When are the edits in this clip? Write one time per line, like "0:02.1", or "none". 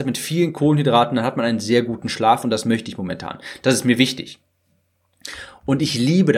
none